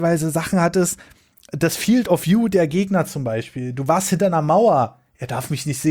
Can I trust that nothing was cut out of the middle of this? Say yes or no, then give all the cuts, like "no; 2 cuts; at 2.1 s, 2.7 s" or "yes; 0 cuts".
yes; 0 cuts